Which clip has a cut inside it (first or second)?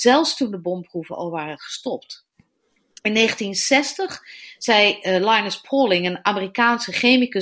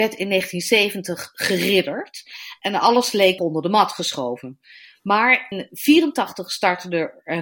second